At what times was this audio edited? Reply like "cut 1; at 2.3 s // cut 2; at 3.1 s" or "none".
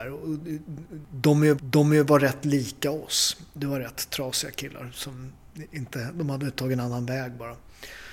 cut 1; at 1.6 s